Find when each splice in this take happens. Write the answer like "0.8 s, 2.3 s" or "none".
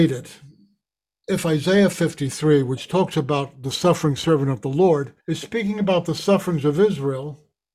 5.2 s